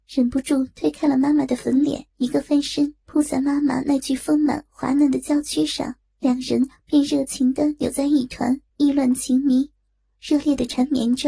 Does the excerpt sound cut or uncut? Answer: cut